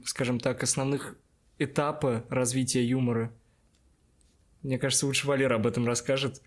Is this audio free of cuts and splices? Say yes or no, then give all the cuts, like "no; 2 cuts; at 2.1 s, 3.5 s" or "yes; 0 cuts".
yes; 0 cuts